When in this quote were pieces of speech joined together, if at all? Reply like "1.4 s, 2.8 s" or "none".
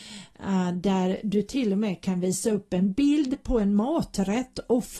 none